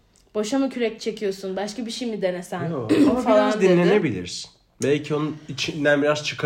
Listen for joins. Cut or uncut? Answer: uncut